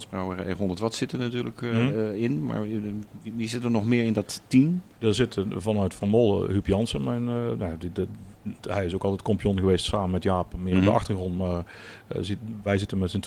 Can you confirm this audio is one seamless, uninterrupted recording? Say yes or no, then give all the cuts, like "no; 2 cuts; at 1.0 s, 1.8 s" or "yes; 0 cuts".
yes; 0 cuts